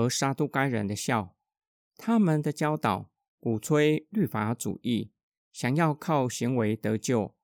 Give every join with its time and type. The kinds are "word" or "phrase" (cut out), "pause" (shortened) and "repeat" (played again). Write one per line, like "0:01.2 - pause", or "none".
none